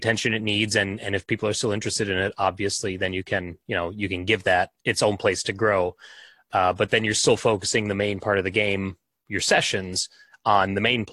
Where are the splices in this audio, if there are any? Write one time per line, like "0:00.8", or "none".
none